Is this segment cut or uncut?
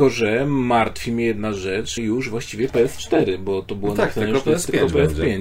cut